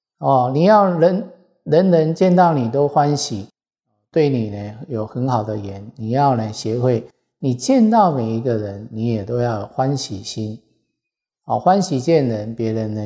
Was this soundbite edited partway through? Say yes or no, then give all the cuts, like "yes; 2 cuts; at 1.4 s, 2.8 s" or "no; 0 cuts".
no; 0 cuts